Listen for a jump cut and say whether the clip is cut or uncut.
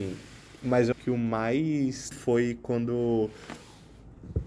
cut